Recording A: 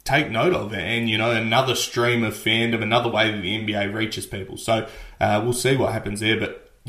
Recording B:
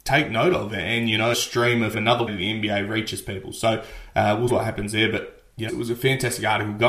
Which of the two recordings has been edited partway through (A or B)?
B